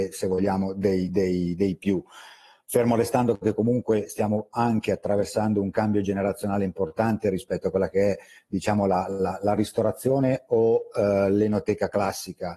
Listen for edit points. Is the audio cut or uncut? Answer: uncut